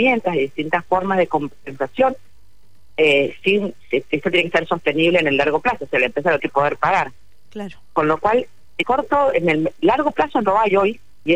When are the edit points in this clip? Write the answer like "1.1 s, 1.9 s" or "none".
6.4 s, 8.8 s